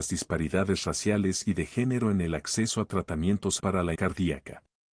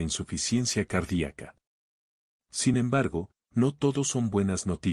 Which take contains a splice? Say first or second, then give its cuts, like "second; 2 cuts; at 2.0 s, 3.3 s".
first; 2 cuts; at 3.6 s, 3.9 s